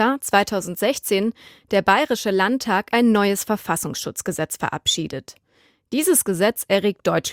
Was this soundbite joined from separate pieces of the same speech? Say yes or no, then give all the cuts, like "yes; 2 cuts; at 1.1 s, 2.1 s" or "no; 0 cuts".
no; 0 cuts